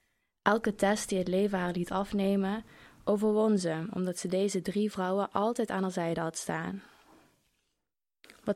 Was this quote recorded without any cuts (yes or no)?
yes